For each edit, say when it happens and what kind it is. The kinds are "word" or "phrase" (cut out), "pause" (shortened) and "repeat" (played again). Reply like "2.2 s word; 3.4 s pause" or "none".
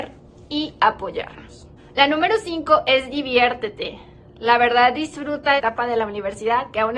5.6 s phrase